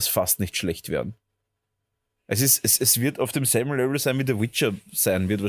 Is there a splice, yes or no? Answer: no